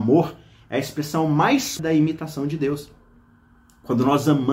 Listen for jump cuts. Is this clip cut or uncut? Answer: cut